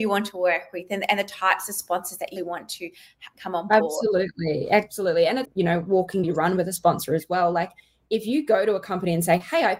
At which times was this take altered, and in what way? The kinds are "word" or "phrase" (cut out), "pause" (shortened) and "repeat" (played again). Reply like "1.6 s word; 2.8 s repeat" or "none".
2.4 s word; 5.4 s word; 6.2 s word